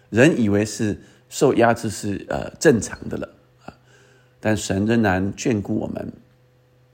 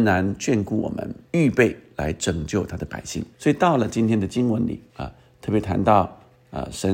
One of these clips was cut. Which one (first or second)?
second